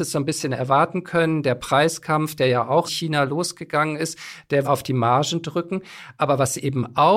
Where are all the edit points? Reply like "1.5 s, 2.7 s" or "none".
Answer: 2.9 s, 4.6 s